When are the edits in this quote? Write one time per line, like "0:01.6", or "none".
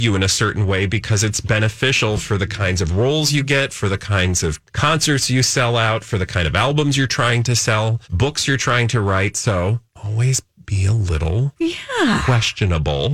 0:04.7
0:08.0
0:09.9
0:11.6